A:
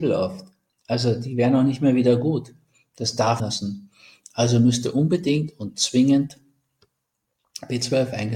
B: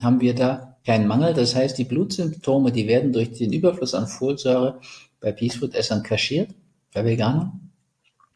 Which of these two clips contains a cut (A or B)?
A